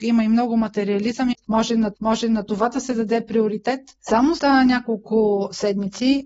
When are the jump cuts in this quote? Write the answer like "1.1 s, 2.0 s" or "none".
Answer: 1.3 s, 1.9 s, 4.4 s